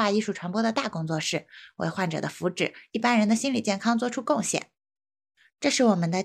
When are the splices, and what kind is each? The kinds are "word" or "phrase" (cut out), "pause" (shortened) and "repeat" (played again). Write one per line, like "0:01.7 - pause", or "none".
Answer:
none